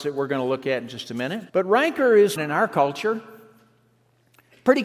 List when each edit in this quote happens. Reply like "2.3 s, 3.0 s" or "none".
1.5 s, 2.4 s